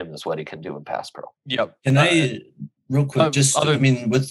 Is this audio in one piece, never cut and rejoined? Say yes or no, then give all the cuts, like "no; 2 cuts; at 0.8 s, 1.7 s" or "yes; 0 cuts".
no; 2 cuts; at 1.4 s, 2.8 s